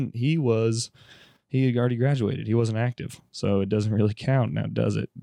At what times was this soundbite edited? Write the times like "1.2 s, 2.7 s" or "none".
none